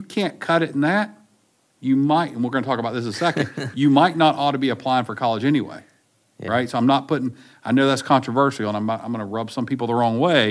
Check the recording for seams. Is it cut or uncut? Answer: uncut